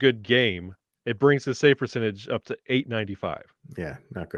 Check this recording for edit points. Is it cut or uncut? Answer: uncut